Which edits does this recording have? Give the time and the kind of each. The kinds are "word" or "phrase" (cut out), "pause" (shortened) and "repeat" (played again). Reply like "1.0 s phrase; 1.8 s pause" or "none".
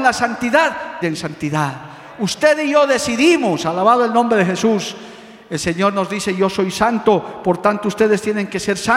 1.0 s phrase